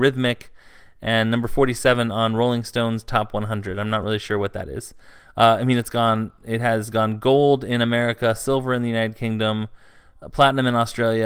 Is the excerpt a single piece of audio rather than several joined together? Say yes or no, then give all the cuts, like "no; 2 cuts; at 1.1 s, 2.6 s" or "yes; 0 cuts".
yes; 0 cuts